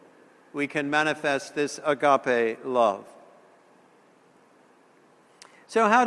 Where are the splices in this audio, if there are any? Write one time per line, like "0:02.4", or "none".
none